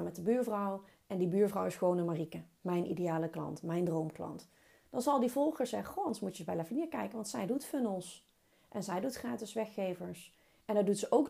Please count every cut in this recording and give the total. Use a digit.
0